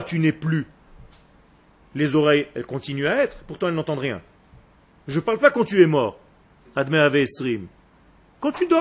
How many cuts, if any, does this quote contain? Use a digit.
1